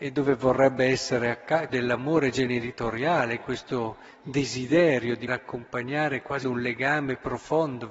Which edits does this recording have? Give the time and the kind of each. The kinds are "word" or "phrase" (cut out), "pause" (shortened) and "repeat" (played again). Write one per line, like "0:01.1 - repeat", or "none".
0:01.7 - word
0:05.3 - word
0:06.4 - word